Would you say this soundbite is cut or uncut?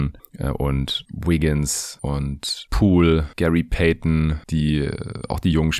uncut